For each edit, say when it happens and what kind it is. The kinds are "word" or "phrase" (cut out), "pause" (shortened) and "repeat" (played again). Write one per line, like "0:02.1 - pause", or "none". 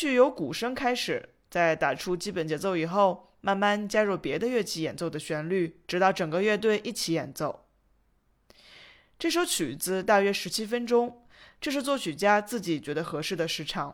0:05.8 - pause